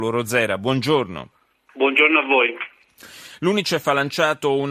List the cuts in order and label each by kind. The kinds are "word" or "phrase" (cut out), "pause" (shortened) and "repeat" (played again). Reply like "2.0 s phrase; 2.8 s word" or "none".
none